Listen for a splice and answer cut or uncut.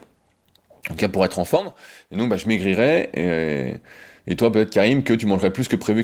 uncut